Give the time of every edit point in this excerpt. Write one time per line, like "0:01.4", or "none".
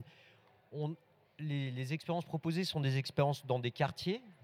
none